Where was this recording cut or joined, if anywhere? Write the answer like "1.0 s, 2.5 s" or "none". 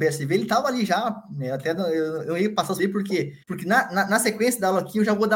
2.8 s, 3.4 s